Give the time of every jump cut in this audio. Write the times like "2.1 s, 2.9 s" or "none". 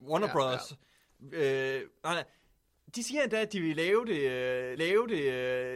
4.8 s